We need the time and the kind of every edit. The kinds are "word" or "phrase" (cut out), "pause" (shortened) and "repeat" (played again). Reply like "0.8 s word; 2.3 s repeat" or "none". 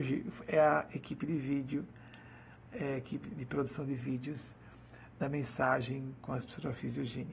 3.2 s word